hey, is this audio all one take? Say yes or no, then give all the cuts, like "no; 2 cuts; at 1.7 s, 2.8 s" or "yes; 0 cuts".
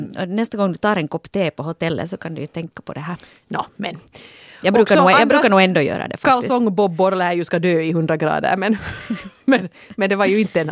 yes; 0 cuts